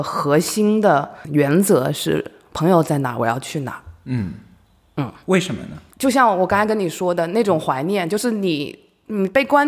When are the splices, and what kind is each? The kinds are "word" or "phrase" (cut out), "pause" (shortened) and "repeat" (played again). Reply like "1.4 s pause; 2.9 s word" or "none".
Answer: 1.2 s word